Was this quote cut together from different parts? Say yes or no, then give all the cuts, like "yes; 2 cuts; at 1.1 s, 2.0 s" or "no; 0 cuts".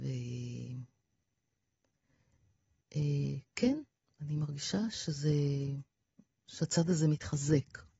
no; 0 cuts